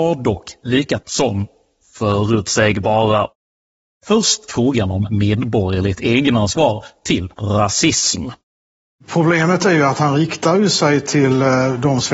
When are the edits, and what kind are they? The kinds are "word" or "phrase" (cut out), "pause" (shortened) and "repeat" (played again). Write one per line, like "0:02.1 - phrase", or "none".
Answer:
0:01.0 - word
0:04.5 - word
0:07.3 - pause